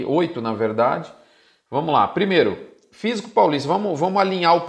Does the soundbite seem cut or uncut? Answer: uncut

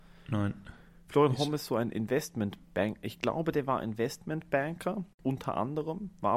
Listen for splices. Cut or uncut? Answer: uncut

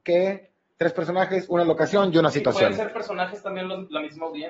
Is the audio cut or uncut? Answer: uncut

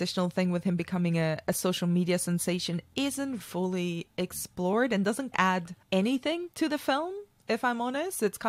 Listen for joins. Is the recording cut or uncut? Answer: cut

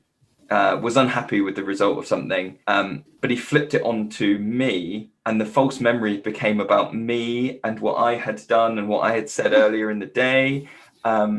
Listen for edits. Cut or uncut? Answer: cut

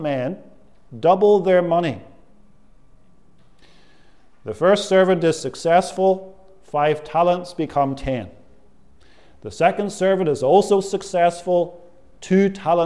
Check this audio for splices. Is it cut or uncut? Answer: uncut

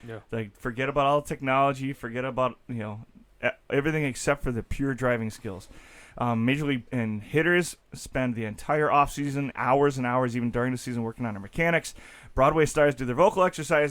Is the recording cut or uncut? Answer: cut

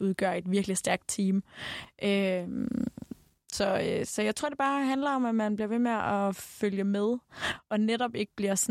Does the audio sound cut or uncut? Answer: uncut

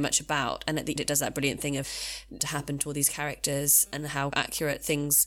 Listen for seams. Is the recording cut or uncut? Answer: cut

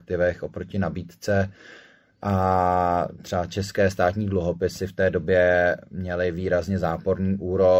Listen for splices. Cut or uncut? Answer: uncut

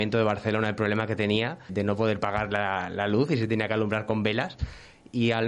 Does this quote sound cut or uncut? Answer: cut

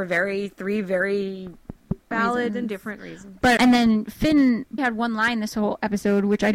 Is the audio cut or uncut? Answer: cut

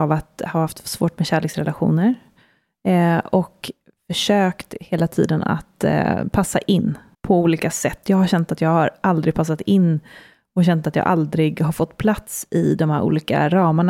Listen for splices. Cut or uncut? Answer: cut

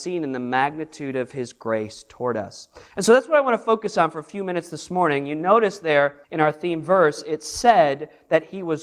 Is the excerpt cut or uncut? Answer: cut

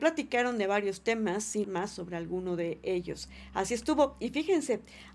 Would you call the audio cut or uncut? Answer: cut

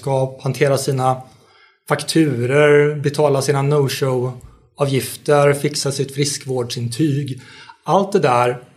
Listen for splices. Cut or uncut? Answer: uncut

